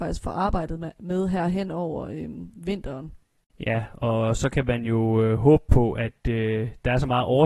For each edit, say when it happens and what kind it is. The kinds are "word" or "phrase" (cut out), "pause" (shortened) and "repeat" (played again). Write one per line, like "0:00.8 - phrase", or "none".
none